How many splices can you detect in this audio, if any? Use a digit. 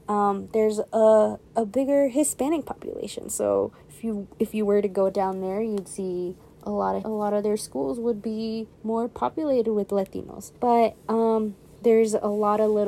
4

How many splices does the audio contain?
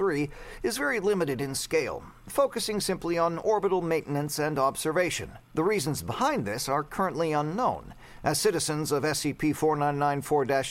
1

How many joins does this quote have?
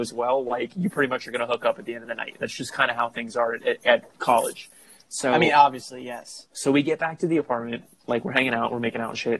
0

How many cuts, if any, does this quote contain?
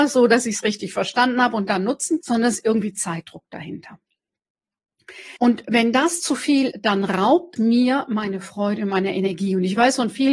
4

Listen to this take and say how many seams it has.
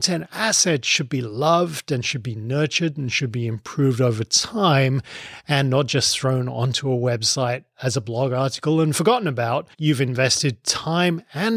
1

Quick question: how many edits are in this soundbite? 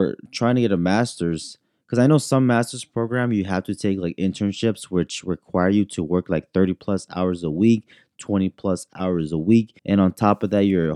1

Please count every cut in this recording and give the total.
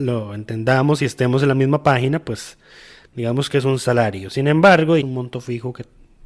1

